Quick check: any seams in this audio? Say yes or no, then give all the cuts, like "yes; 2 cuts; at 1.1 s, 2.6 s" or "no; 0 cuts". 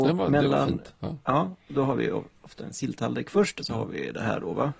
yes; 3 cuts; at 1.7 s, 2.7 s, 3.6 s